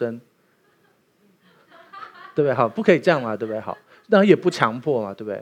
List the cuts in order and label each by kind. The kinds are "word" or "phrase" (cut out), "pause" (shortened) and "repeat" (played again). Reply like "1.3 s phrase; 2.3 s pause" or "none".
none